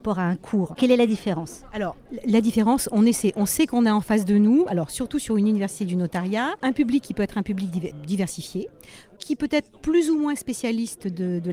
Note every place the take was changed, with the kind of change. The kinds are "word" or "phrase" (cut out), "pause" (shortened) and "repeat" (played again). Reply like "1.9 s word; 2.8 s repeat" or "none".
none